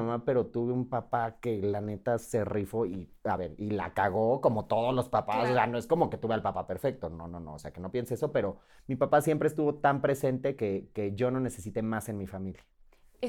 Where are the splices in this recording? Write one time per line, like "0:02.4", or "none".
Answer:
none